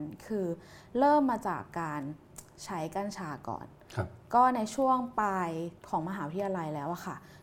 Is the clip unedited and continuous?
no; 1 cut; at 5.8 s

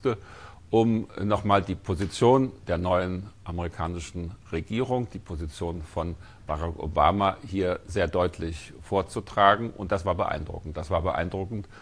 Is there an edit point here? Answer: no; 0 cuts

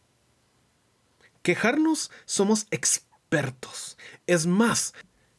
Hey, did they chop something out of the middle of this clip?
no; 0 cuts

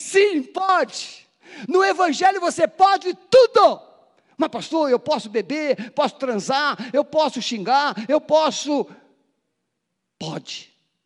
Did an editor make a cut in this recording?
no; 0 cuts

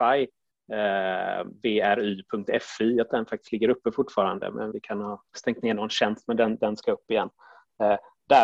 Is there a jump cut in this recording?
yes; 3 cuts; at 3.1 s, 4.7 s, 5.3 s

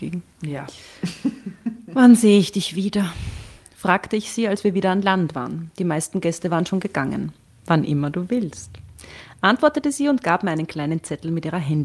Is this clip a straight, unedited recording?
no; 1 cut; at 7.5 s

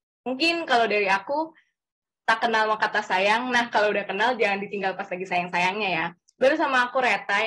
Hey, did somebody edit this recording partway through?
no; 0 cuts

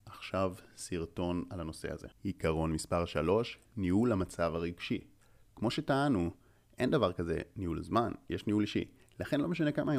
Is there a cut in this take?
no; 0 cuts

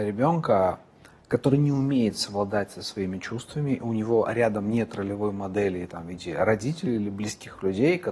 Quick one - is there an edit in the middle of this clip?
no; 0 cuts

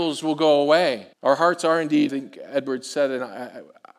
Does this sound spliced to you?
yes; 2 cuts; at 1.1 s, 2.1 s

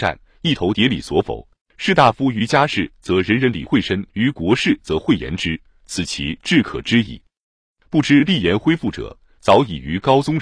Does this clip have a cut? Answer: yes; 2 cuts; at 1.6 s, 4.1 s

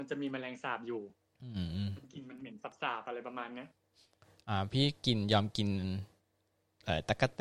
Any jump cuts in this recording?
no; 0 cuts

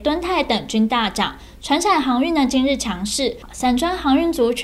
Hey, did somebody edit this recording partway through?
no; 0 cuts

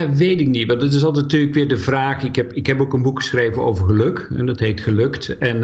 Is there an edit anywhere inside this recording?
no; 0 cuts

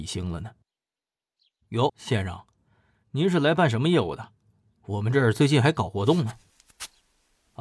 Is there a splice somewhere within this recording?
yes; 1 cut; at 1.9 s

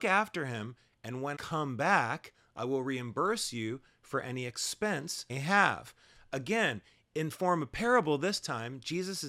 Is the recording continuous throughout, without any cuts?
no; 2 cuts; at 1.4 s, 5.3 s

